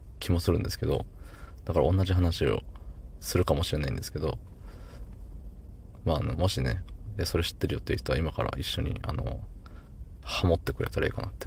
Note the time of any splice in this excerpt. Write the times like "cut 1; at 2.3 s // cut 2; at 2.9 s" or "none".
cut 1; at 10.2 s